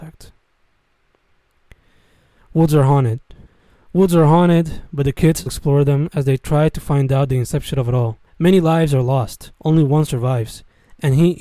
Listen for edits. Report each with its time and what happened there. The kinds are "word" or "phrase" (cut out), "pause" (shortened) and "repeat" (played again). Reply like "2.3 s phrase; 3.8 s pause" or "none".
3.4 s pause; 5.5 s word; 8.3 s pause; 9.5 s pause